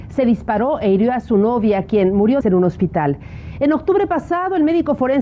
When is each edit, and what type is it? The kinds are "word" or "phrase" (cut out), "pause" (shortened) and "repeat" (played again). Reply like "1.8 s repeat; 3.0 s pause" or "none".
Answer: 2.4 s word